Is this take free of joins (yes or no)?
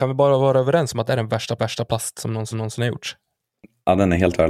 no